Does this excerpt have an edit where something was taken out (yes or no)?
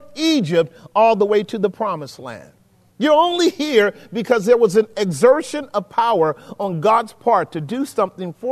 no